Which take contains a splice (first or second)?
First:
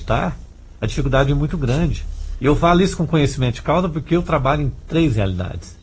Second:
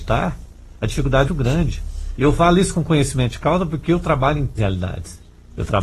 second